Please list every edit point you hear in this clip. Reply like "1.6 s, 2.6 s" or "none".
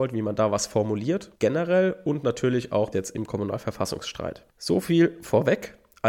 1.4 s, 2.9 s, 4.5 s